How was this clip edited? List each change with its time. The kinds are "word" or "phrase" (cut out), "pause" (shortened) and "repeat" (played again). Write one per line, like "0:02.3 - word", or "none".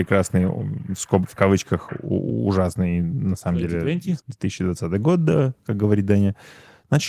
0:04.2 - pause